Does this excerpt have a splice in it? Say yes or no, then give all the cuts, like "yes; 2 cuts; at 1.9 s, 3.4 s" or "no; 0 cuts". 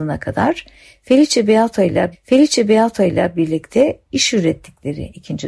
yes; 1 cut; at 2.1 s